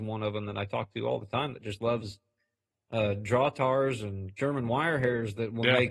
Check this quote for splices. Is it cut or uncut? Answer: uncut